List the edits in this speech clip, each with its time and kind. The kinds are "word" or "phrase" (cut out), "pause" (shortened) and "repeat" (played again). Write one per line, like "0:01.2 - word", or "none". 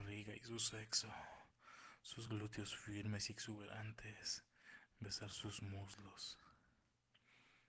none